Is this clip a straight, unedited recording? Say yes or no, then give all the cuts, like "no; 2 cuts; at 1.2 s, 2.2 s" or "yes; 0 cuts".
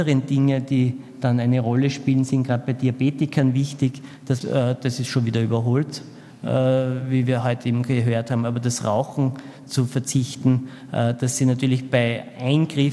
no; 1 cut; at 4.4 s